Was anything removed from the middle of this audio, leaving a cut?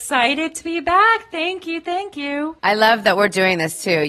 yes; 1 cut; at 2.6 s

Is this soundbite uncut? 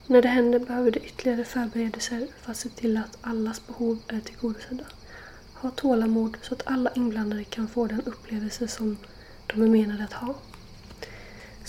yes; 0 cuts

